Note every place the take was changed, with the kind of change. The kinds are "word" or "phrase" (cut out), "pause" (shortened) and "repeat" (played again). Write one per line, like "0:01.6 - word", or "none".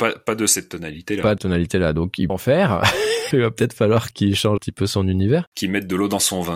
0:01.4 - word
0:02.3 - word
0:03.3 - word
0:04.1 - word
0:04.6 - word

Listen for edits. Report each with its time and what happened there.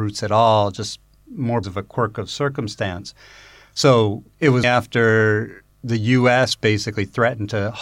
0:01.6 - word
0:04.6 - word

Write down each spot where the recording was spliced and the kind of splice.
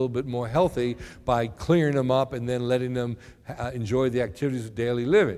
none

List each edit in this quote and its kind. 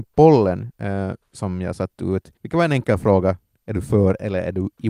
0:02.4 - pause

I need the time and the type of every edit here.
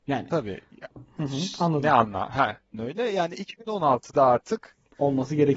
0:02.7 - word

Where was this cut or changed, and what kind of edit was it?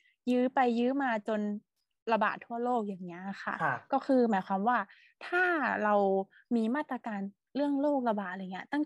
none

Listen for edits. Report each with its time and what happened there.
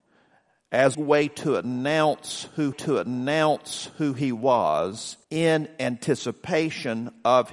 0:00.9 - phrase
0:02.7 - repeat
0:05.2 - pause

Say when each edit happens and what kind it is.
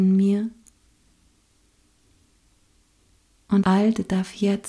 0:03.6 - word

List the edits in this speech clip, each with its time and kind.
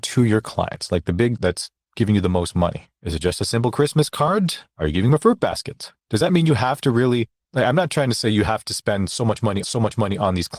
0:01.4 - word
0:03.0 - pause
0:04.7 - pause
0:06.0 - pause
0:09.6 - repeat

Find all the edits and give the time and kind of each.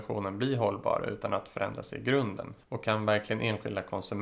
0:02.6 - pause

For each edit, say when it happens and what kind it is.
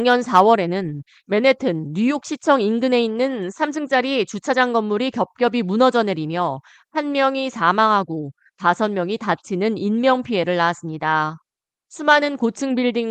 none

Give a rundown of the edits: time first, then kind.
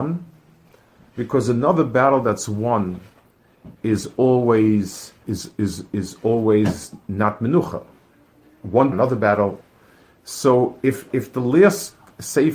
0:05.2 - word
0:08.9 - phrase

